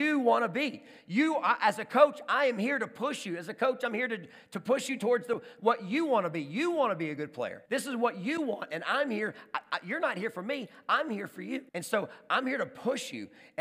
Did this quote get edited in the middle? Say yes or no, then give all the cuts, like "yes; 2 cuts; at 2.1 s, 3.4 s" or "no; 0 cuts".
yes; 2 cuts; at 7.7 s, 11.7 s